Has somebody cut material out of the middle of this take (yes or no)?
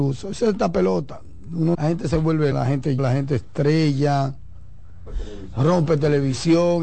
yes